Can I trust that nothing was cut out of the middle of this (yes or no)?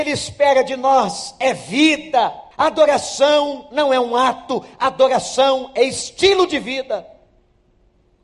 no